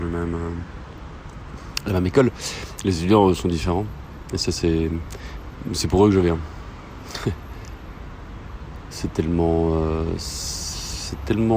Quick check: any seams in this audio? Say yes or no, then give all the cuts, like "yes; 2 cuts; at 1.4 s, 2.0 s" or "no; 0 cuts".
no; 0 cuts